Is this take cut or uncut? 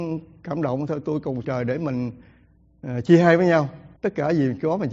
cut